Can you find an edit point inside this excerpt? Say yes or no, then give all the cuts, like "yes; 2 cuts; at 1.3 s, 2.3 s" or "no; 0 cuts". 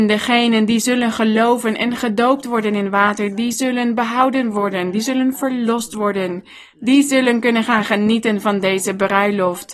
no; 0 cuts